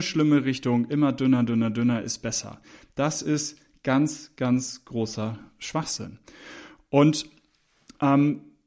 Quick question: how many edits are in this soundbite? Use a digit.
0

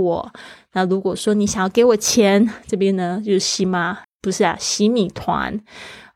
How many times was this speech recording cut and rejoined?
1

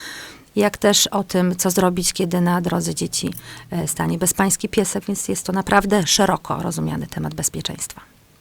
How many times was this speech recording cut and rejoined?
0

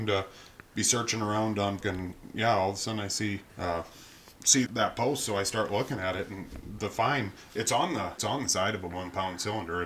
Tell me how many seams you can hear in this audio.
5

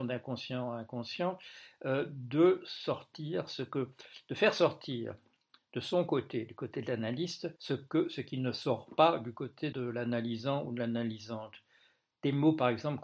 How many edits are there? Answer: 2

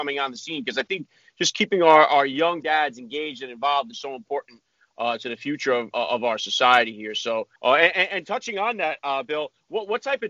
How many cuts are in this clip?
3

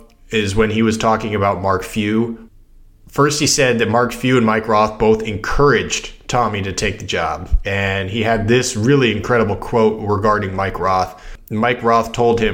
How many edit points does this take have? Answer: 0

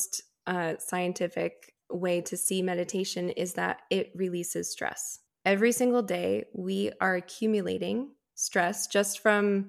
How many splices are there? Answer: 2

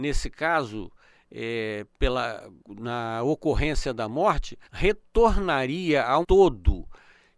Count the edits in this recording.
3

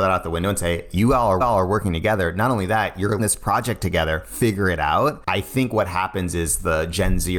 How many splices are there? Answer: 2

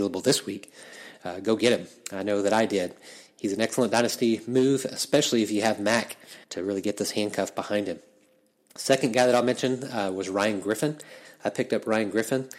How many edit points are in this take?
1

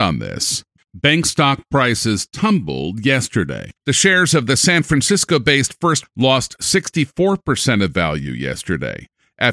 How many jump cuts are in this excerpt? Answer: 2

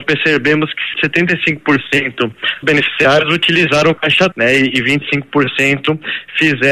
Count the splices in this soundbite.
3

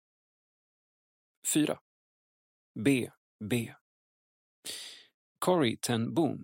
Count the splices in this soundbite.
1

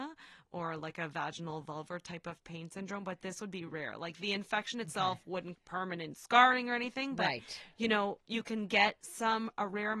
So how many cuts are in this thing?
2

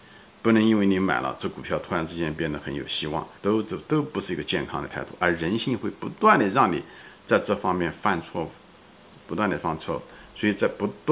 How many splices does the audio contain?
1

